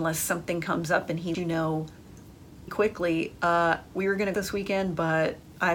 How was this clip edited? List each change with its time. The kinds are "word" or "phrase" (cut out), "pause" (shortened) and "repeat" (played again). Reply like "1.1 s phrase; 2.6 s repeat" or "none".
1.3 s word; 2.7 s word; 4.3 s word

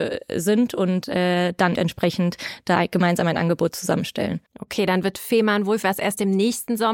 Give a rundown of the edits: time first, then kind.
1.7 s word; 4.5 s pause; 5.8 s word

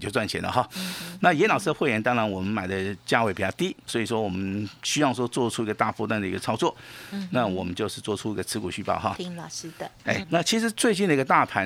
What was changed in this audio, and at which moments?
3.9 s word; 10.2 s word

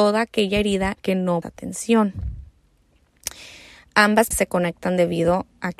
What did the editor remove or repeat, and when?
1.0 s word; 1.4 s word; 4.3 s word

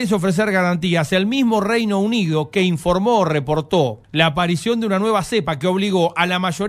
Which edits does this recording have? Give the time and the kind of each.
4.0 s pause

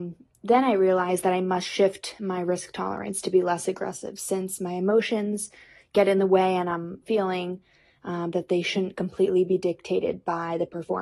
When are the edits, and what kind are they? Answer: 7.0 s word

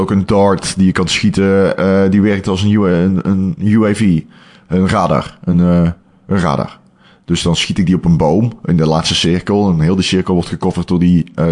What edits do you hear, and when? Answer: none

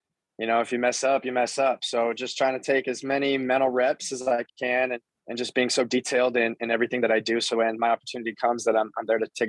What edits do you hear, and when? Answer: 4.5 s pause; 5.1 s pause

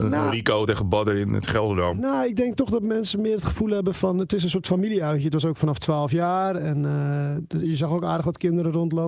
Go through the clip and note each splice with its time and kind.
none

